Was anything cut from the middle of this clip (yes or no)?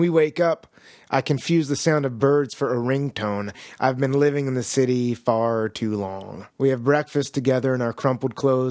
yes